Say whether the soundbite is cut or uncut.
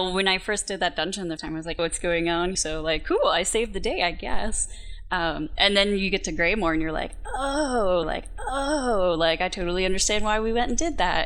cut